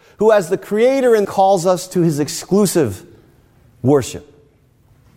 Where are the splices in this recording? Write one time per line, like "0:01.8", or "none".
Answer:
0:01.2